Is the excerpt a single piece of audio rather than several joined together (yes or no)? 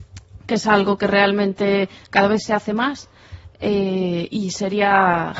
yes